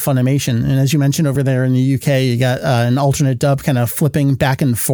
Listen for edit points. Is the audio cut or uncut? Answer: uncut